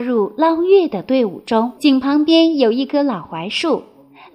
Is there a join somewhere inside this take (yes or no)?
yes